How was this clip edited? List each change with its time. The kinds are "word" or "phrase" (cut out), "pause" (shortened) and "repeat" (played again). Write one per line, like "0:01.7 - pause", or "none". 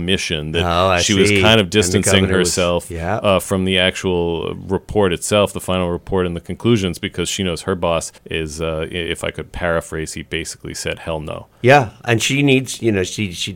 0:08.2 - pause